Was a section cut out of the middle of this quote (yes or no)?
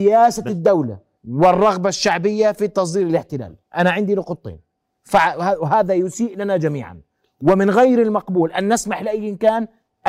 yes